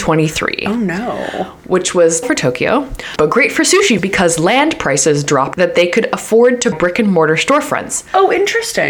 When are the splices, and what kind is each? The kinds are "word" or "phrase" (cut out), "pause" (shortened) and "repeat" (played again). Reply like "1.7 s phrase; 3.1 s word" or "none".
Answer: 2.2 s word; 3.2 s word; 4.0 s word; 5.5 s word; 6.7 s word

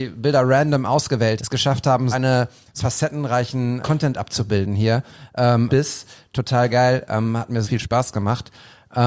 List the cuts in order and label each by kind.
1.4 s word; 2.1 s word; 2.8 s word; 3.8 s word; 5.7 s word; 7.6 s word

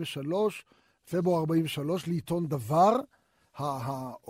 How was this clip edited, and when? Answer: none

